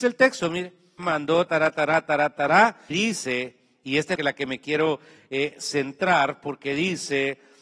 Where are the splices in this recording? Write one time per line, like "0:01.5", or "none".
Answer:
0:01.0
0:01.5
0:02.9
0:04.2